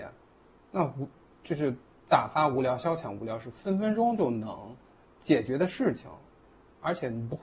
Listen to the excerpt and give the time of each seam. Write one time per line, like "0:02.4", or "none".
none